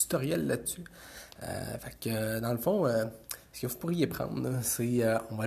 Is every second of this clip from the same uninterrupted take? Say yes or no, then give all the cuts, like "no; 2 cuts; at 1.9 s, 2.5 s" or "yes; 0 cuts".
yes; 0 cuts